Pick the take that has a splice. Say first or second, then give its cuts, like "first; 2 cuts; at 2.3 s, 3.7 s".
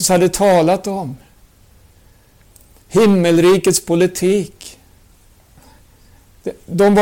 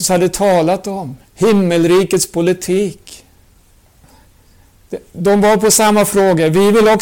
second; 1 cut; at 1.2 s